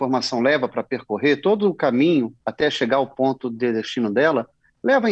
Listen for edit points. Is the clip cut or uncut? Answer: cut